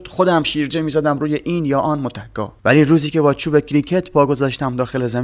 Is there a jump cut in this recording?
yes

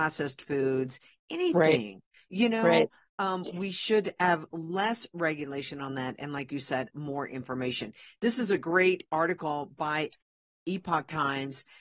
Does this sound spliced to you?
no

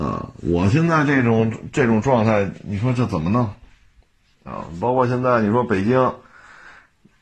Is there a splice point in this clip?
no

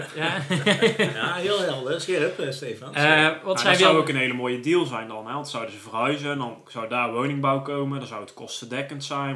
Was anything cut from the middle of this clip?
no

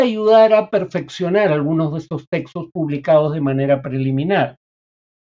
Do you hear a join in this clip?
no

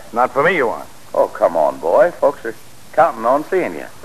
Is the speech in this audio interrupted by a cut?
no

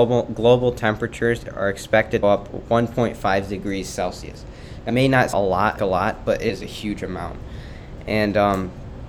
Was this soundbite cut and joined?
yes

